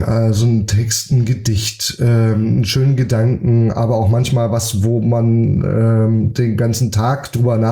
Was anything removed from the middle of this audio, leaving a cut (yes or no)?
no